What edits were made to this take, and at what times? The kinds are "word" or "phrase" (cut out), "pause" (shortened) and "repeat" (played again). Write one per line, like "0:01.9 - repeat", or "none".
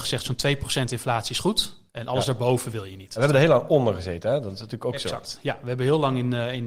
0:01.9 - pause